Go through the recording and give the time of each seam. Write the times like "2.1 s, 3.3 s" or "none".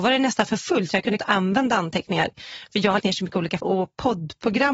1.2 s, 3.0 s, 3.6 s